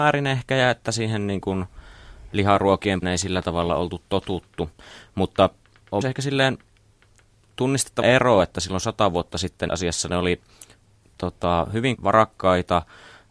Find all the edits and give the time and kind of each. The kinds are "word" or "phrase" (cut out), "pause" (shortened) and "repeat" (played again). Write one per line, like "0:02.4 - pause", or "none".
0:03.0 - word
0:06.0 - word
0:08.0 - word
0:09.7 - word
0:11.0 - word
0:12.0 - word